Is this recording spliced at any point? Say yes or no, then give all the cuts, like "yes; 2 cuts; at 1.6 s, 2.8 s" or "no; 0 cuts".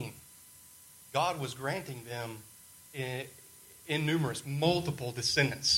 no; 0 cuts